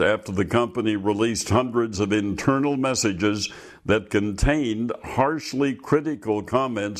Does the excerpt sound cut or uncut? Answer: uncut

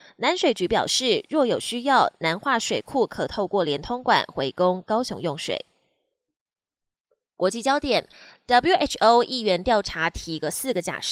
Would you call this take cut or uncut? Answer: uncut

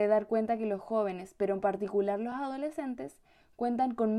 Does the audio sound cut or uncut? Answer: uncut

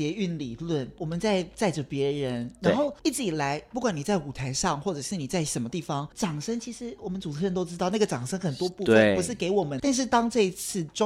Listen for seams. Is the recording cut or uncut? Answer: cut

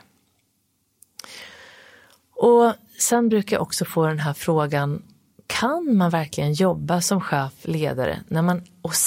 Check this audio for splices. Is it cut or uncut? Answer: uncut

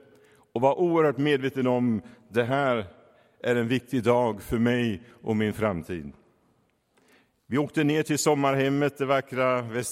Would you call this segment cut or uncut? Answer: uncut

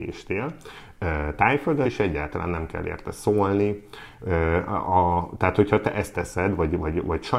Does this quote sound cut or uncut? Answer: cut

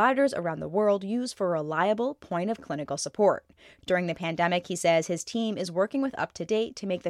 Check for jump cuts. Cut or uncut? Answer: cut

